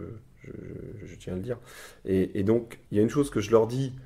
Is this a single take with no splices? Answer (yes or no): no